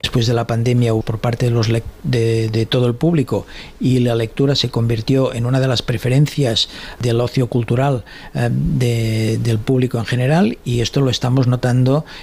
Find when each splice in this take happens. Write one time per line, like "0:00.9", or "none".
0:01.0